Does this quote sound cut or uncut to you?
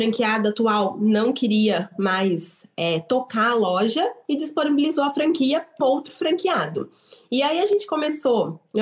cut